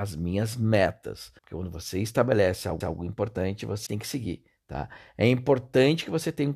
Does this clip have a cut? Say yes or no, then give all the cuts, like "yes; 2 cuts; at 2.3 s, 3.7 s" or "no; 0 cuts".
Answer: yes; 3 cuts; at 1.4 s, 2.8 s, 3.9 s